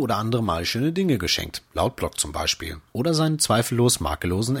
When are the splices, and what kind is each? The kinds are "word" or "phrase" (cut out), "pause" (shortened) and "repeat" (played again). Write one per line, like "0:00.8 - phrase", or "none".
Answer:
0:01.7 - pause
0:02.9 - pause

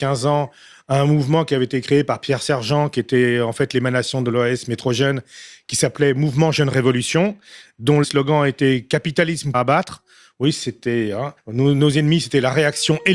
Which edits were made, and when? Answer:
0:08.0 - word
0:09.5 - phrase

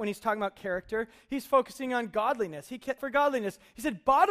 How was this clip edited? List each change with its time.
0:03.0 - phrase

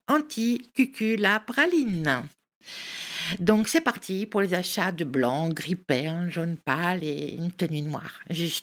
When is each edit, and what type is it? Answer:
none

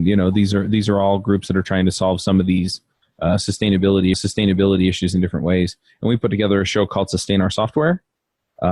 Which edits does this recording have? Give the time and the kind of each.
0:04.1 - repeat

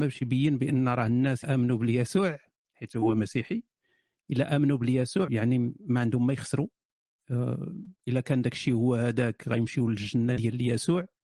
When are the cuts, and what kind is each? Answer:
0:01.4 - word
0:05.3 - word
0:08.0 - pause

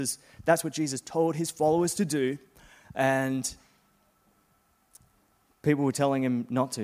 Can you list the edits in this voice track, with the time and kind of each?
none

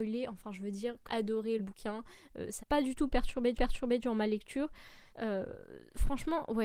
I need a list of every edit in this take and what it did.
0:01.1 - word
0:01.6 - word
0:02.6 - word
0:03.5 - repeat
0:05.1 - pause

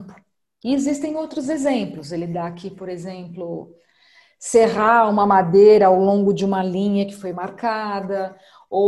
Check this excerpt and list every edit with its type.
none

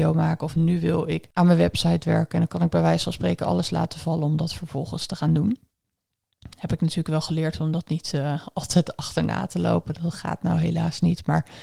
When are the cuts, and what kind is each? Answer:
0:01.3 - pause

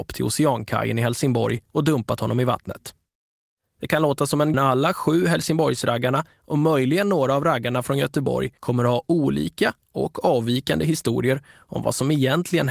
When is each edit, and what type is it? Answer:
0:01.7 - pause
0:03.1 - pause
0:04.5 - phrase
0:08.6 - pause

